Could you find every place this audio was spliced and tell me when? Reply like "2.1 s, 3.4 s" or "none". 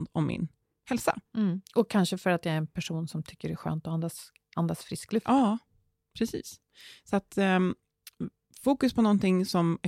none